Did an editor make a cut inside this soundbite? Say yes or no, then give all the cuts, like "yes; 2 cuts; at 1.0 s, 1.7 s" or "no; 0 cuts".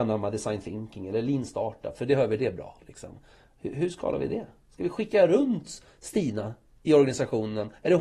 no; 0 cuts